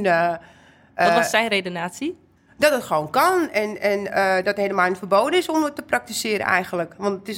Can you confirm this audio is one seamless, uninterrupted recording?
yes; 0 cuts

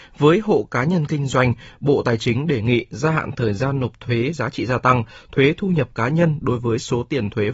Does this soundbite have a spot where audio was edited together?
no; 0 cuts

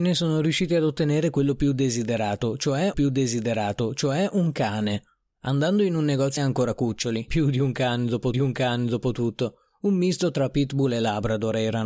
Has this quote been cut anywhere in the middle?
yes; 4 cuts; at 2.9 s, 6.4 s, 7.3 s, 8.3 s

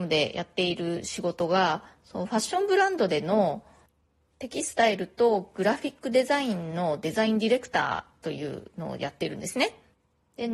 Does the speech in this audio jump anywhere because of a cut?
no; 0 cuts

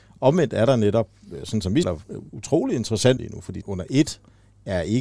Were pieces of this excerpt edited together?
yes; 4 cuts; at 1.8 s, 2.3 s, 3.2 s, 3.6 s

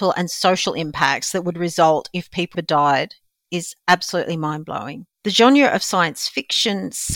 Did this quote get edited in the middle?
yes; 2 cuts; at 2.5 s, 5.1 s

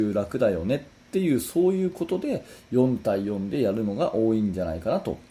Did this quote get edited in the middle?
no; 0 cuts

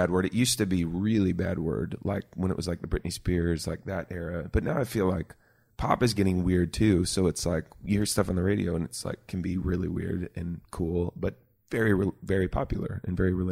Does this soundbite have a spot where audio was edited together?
no; 0 cuts

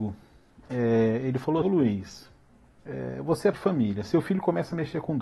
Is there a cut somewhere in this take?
yes; 2 cuts; at 1.6 s, 3.5 s

